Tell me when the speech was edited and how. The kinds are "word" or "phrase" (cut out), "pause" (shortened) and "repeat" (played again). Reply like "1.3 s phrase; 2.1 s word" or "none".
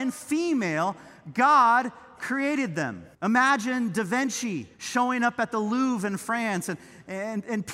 3.1 s pause; 4.7 s pause